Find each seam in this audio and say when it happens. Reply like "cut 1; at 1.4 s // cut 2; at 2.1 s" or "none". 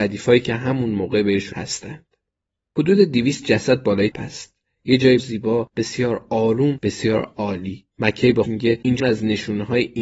cut 1; at 1.5 s // cut 2; at 4.1 s // cut 3; at 5.2 s // cut 4; at 7.9 s // cut 5; at 8.4 s // cut 6; at 9.0 s